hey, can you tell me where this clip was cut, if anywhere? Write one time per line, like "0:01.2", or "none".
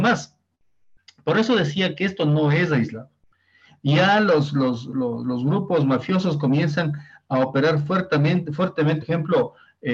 0:09.0